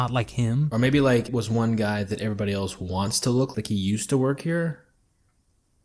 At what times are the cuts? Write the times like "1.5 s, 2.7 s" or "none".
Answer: 1.3 s, 3.5 s